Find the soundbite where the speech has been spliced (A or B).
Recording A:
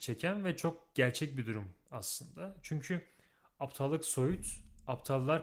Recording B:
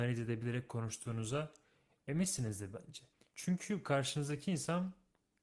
B